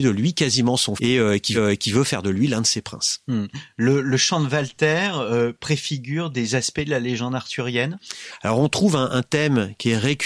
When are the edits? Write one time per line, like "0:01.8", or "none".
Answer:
0:01.0
0:01.5